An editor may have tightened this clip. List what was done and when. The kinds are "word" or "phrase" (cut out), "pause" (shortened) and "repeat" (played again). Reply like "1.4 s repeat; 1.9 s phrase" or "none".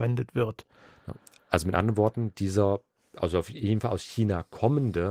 none